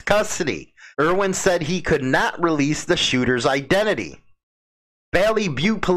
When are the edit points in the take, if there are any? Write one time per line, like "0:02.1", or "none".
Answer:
0:00.9